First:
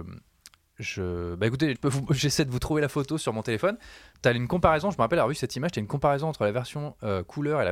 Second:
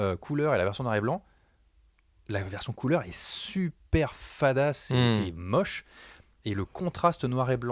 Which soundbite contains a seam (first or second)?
first